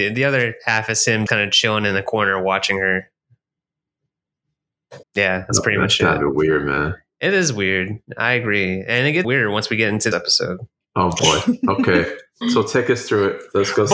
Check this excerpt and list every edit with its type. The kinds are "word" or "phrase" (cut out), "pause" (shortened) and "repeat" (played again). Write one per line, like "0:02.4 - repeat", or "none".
0:01.3 - word
0:05.0 - pause
0:09.2 - word
0:10.1 - phrase
0:12.4 - word